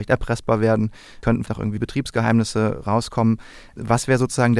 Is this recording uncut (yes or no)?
no